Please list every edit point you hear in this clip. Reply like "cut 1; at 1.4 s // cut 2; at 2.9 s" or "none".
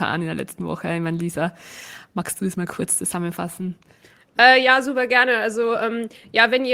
none